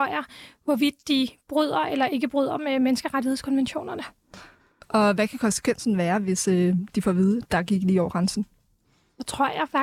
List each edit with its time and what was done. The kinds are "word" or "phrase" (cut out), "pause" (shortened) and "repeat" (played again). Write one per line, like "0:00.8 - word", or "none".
none